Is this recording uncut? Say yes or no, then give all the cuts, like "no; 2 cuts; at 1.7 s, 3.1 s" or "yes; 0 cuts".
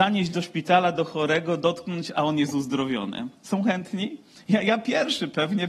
yes; 0 cuts